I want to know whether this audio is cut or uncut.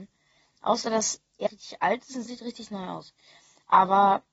cut